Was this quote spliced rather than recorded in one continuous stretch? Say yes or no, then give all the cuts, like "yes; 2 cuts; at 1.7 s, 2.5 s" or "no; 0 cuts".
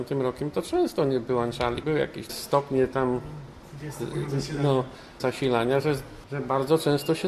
yes; 3 cuts; at 1.8 s, 2.3 s, 5.2 s